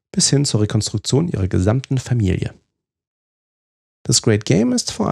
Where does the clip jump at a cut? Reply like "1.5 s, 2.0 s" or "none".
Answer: none

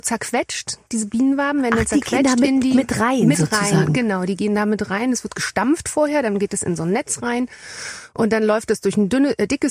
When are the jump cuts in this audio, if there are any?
none

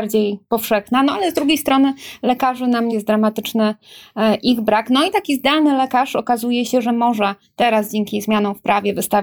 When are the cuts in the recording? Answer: 2.9 s

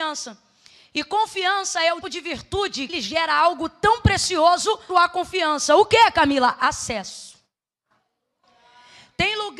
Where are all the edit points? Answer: 2.0 s, 2.9 s, 4.9 s

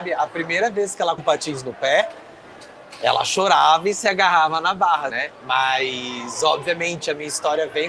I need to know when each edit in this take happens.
1.2 s, 5.1 s

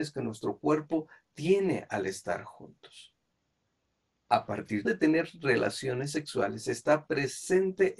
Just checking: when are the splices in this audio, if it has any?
4.8 s

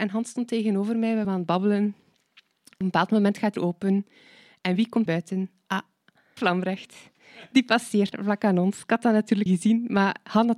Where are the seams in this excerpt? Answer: 1.2 s, 2.8 s, 3.6 s, 5.1 s, 6.4 s, 8.1 s, 9.5 s

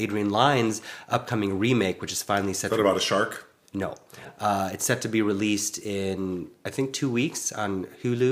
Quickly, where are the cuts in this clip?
none

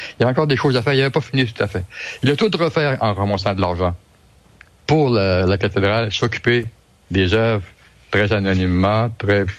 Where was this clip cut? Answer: none

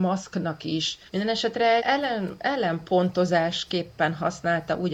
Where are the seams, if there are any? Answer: 1.1 s, 1.8 s

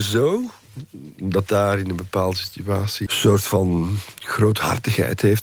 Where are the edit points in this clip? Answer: 1.5 s, 3.1 s

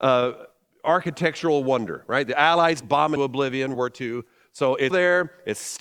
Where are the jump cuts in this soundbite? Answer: 2.8 s, 3.2 s, 3.7 s, 4.9 s

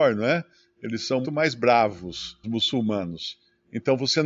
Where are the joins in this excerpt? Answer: 1.2 s, 2.4 s

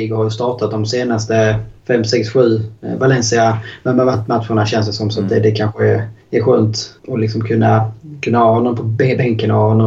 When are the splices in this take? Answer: 1.8 s, 6.2 s, 7.0 s

